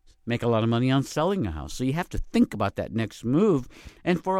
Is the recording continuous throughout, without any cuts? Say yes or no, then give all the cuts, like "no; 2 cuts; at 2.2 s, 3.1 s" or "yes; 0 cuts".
yes; 0 cuts